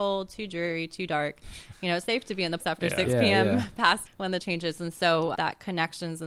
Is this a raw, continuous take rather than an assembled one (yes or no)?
no